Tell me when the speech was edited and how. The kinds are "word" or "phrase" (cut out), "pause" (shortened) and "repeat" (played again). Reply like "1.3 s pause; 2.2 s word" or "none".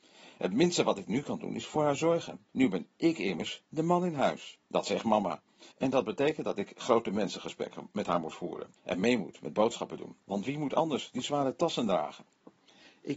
2.5 s pause; 4.6 s pause; 5.7 s pause; 8.8 s pause; 10.2 s pause